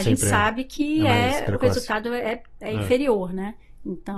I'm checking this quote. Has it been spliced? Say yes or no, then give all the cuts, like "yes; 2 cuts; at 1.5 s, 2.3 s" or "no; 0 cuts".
no; 0 cuts